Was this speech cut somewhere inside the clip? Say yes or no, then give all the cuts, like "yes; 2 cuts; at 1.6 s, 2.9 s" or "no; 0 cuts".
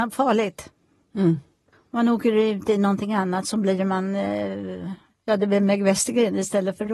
no; 0 cuts